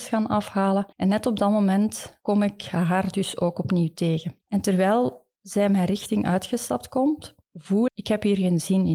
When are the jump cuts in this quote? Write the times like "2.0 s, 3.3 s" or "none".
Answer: 0.9 s, 7.9 s